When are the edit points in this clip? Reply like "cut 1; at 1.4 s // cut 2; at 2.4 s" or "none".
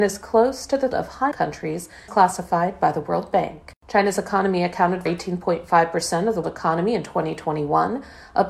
cut 1; at 0.9 s // cut 2; at 1.3 s // cut 3; at 2.1 s // cut 4; at 3.8 s // cut 5; at 5.1 s // cut 6; at 6.4 s